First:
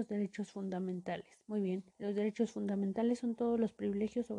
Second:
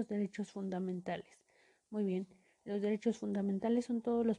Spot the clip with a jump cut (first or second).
first